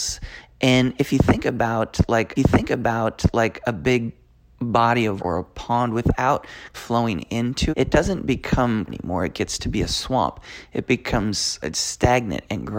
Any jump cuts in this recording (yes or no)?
yes